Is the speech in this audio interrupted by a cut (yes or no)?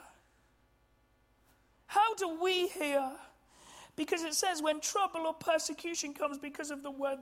no